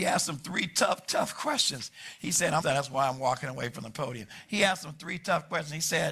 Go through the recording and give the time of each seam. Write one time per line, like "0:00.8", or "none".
0:02.6

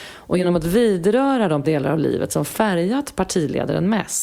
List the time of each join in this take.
0:01.6

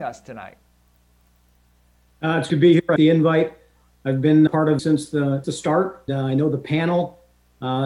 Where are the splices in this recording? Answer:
0:02.5
0:03.0
0:04.5
0:04.8
0:05.4
0:06.1

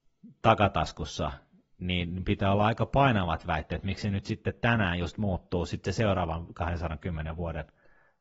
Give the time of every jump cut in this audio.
none

